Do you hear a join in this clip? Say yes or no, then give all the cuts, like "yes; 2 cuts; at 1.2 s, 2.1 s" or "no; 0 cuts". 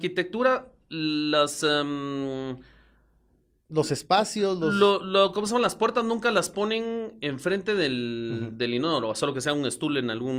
no; 0 cuts